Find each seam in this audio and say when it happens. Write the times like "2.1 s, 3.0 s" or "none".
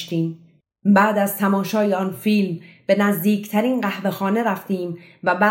none

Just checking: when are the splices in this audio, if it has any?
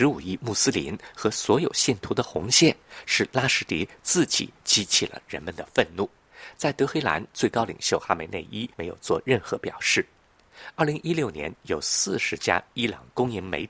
6.2 s, 8.7 s

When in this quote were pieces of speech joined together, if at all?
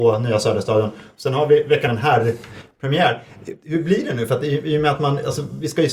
1.9 s

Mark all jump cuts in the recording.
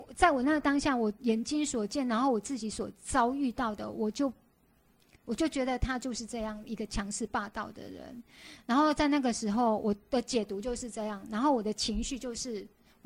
none

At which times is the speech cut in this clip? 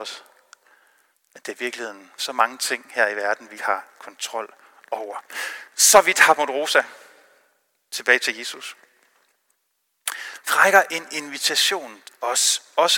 2.2 s, 3.5 s, 10.5 s, 12.0 s

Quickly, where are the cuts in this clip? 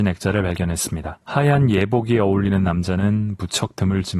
1.2 s

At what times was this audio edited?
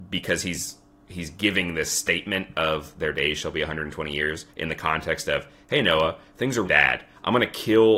4.5 s, 6.6 s

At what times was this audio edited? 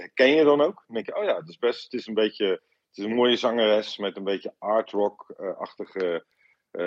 none

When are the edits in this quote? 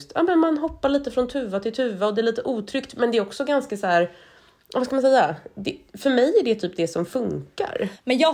none

